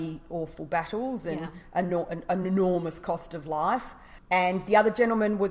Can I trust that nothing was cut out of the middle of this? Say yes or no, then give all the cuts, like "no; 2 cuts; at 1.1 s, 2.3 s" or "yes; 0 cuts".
yes; 0 cuts